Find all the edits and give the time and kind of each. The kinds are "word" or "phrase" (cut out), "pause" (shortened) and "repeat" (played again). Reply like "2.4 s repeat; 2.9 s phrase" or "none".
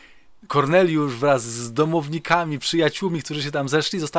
none